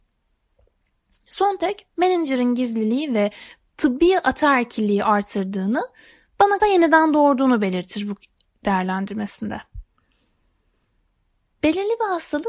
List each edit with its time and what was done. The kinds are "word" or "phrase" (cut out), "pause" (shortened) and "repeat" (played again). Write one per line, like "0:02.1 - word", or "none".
0:06.6 - word